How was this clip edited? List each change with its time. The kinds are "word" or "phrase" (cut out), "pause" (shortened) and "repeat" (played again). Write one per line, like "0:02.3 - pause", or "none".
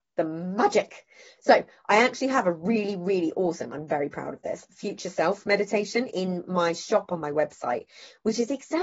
none